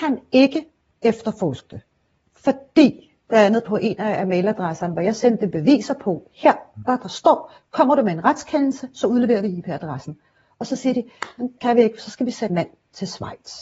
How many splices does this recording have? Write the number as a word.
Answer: three